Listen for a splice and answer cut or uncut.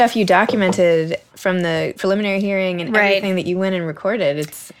uncut